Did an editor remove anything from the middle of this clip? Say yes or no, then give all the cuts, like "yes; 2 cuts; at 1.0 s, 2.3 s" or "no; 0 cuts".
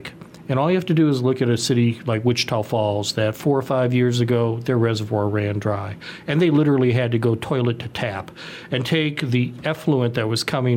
no; 0 cuts